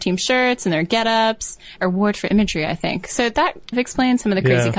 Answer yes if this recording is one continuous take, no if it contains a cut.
no